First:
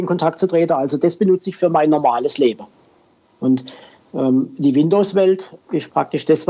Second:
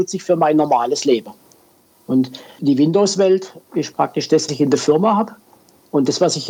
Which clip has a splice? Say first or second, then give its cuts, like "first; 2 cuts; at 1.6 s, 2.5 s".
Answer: second; 2 cuts; at 2.6 s, 4.5 s